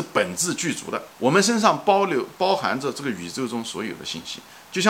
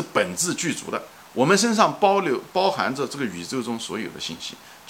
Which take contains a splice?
first; 1 cut; at 1.1 s

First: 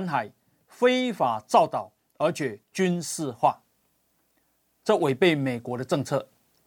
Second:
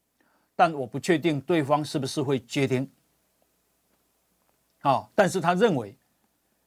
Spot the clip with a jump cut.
first; 1 cut; at 2.6 s

